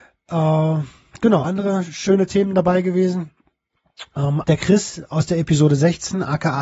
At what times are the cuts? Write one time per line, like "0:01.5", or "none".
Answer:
0:01.4
0:04.4